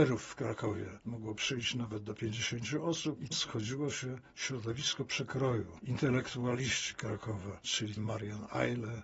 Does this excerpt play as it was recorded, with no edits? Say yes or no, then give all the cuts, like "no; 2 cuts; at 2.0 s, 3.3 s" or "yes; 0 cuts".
no; 2 cuts; at 3.3 s, 8.0 s